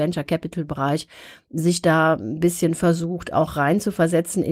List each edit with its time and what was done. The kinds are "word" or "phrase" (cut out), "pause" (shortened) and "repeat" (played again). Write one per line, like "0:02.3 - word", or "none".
none